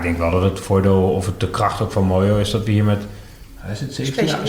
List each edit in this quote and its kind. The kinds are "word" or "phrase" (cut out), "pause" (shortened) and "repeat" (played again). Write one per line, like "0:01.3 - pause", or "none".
none